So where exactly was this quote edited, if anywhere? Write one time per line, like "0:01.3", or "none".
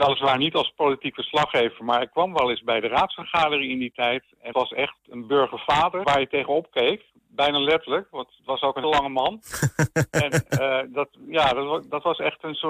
0:04.5
0:06.0
0:08.8